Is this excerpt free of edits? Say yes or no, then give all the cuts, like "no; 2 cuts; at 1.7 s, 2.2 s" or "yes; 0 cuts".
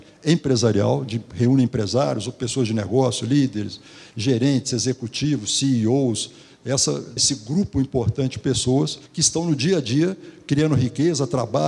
no; 2 cuts; at 7.2 s, 9.1 s